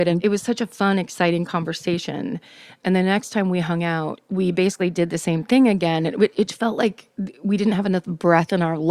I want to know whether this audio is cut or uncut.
uncut